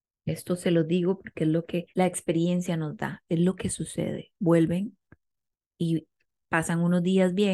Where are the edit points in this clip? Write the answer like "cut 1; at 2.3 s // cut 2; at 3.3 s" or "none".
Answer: cut 1; at 1.9 s // cut 2; at 4.4 s